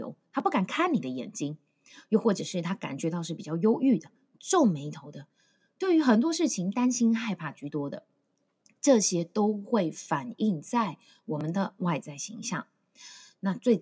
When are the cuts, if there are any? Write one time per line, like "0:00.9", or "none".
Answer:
none